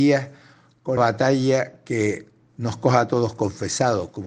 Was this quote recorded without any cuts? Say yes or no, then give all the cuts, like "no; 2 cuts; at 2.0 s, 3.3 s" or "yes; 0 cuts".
no; 1 cut; at 1.0 s